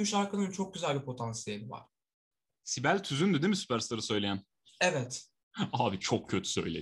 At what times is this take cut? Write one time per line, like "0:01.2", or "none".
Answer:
none